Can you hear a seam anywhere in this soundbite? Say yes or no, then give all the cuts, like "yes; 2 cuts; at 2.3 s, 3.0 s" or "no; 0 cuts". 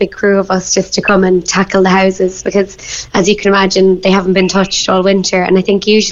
no; 0 cuts